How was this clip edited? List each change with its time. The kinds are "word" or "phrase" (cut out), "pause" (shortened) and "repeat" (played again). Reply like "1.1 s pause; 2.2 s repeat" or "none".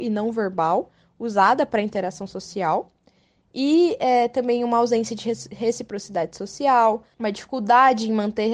none